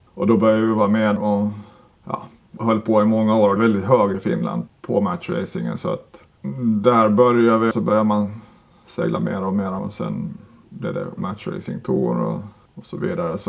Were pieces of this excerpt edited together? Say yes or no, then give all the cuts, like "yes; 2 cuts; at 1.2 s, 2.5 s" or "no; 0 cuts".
yes; 8 cuts; at 1.2 s, 2.6 s, 3.6 s, 4.1 s, 4.7 s, 7.7 s, 9.8 s, 11.2 s